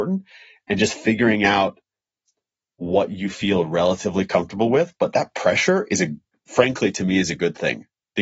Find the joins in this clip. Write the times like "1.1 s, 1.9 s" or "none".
none